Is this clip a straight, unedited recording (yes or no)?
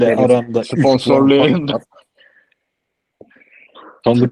yes